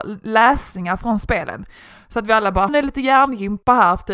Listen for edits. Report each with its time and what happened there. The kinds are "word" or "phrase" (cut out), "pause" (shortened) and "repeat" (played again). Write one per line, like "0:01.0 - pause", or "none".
0:02.7 - word